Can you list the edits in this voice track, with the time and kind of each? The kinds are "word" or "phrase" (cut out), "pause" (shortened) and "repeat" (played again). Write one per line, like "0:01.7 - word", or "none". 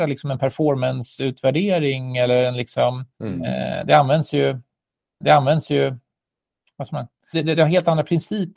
0:03.1 - pause
0:05.2 - repeat
0:07.3 - word